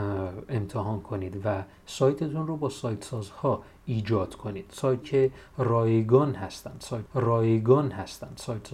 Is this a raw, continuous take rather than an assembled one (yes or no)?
no